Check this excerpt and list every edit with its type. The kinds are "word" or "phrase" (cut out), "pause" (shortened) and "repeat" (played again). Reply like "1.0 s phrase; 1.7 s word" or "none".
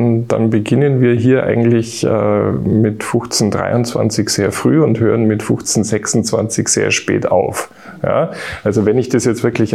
none